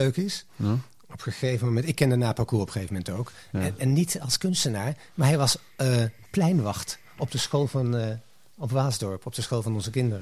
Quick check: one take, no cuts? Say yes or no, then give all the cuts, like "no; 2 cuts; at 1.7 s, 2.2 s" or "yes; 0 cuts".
yes; 0 cuts